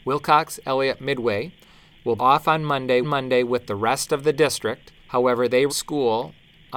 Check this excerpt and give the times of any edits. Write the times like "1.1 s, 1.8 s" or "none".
2.2 s, 3.0 s, 5.0 s, 5.7 s